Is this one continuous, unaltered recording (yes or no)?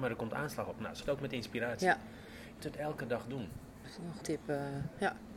no